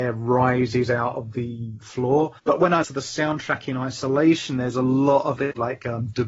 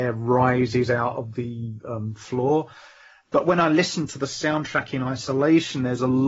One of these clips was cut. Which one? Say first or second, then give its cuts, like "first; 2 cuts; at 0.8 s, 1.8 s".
first; 4 cuts; at 1.8 s, 2.4 s, 2.8 s, 5.4 s